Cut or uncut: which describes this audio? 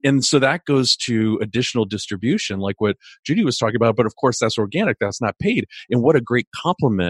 uncut